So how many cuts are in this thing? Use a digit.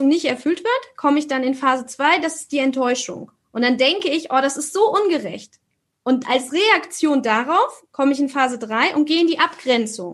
0